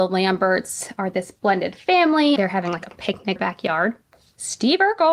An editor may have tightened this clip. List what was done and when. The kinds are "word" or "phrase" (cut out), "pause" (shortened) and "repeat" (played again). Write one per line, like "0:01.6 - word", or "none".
0:02.4 - word
0:03.4 - phrase